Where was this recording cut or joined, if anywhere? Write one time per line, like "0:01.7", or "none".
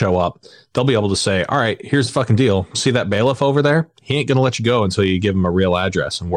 none